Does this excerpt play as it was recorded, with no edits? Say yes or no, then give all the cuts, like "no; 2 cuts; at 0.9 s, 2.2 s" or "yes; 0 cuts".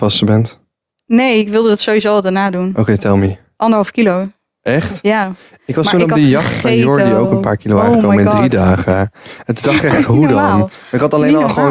yes; 0 cuts